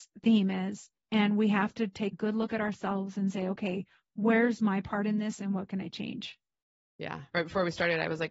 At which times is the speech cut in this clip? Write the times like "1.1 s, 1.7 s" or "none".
1.0 s, 2.1 s